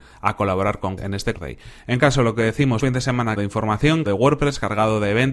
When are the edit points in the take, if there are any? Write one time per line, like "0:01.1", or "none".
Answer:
0:01.0
0:01.3
0:02.0
0:02.8
0:03.4
0:04.1